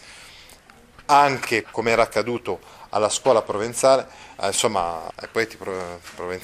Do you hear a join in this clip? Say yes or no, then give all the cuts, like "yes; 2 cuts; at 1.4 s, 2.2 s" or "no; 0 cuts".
yes; 2 cuts; at 1.6 s, 5.1 s